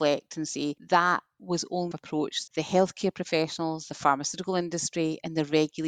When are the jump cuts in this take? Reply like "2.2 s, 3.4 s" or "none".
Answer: 1.9 s, 2.5 s